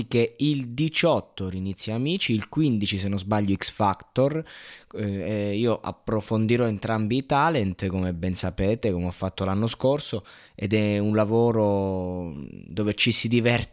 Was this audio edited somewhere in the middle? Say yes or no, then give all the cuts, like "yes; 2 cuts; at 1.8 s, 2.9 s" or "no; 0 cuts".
no; 0 cuts